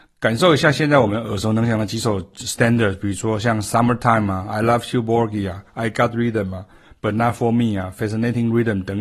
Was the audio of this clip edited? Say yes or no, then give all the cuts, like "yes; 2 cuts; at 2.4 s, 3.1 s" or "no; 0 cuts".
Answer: no; 0 cuts